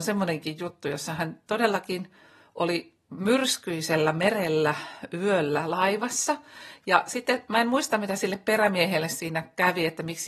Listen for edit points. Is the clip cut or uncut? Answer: uncut